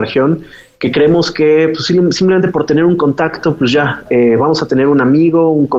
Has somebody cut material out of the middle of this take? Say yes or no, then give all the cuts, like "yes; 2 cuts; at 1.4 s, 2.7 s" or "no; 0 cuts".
no; 0 cuts